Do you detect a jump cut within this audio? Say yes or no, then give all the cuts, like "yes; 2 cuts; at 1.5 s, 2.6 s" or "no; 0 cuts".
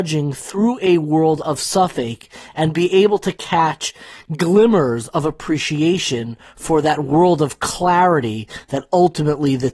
no; 0 cuts